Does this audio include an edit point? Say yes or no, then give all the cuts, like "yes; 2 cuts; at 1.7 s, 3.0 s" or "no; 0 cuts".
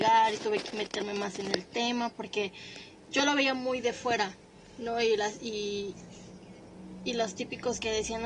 no; 0 cuts